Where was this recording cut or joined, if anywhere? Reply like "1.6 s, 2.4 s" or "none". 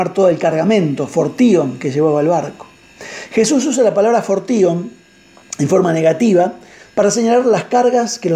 none